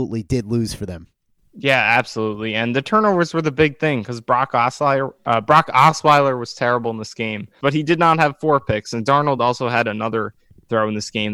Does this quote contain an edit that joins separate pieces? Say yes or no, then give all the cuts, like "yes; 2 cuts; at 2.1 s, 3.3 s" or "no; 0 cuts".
no; 0 cuts